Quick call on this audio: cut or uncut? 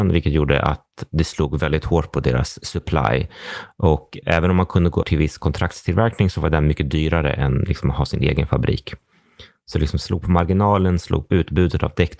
cut